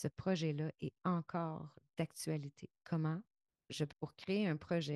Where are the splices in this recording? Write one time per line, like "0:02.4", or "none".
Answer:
0:03.9